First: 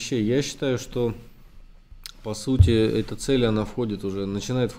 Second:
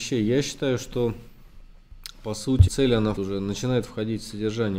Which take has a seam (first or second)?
second